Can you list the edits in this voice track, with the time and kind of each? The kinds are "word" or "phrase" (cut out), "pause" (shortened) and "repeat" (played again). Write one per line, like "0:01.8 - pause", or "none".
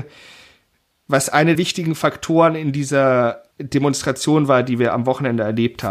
0:01.5 - word
0:03.5 - pause